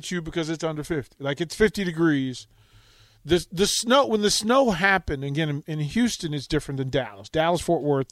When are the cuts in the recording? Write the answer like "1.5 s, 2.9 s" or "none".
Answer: none